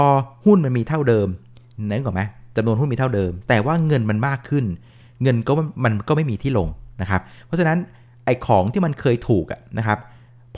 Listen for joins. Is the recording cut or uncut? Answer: uncut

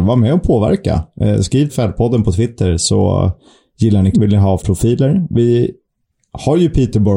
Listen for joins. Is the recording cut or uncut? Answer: cut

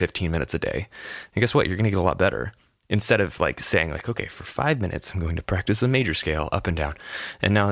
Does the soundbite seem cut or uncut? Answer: uncut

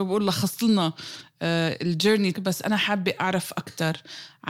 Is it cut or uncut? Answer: cut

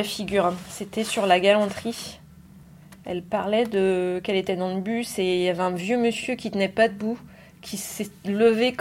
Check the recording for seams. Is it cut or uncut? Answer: uncut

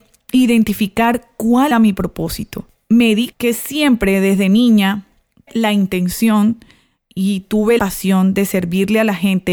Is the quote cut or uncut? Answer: cut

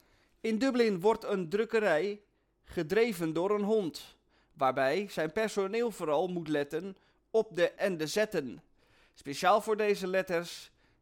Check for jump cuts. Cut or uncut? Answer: cut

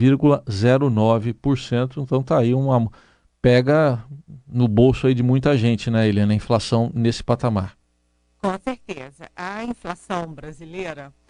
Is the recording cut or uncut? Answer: uncut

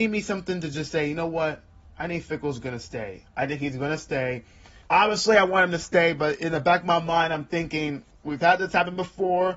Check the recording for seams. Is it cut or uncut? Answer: cut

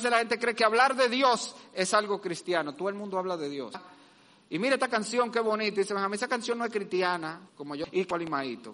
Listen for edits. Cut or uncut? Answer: cut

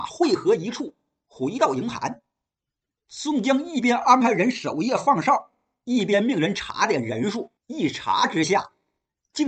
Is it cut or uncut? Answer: cut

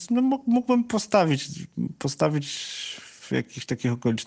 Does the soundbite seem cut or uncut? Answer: uncut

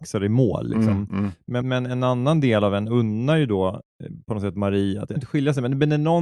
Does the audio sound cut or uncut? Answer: cut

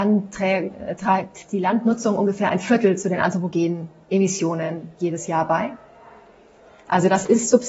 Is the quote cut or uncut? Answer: uncut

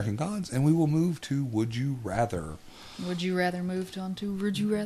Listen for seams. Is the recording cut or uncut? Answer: uncut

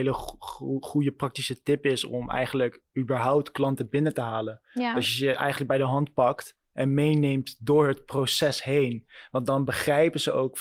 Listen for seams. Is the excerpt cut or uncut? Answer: uncut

